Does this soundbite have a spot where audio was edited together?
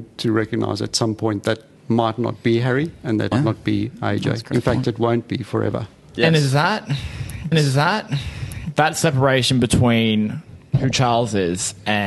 yes; 3 cuts; at 1.8 s, 3.3 s, 7.5 s

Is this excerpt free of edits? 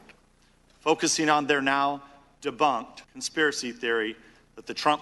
no; 1 cut; at 3.0 s

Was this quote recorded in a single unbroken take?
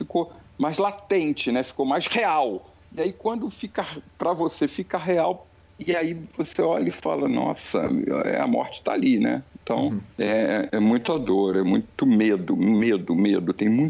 no; 1 cut; at 10.1 s

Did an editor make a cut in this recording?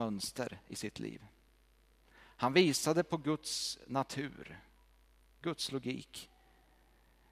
no; 0 cuts

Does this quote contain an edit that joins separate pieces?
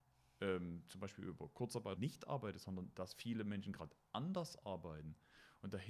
yes; 1 cut; at 2.0 s

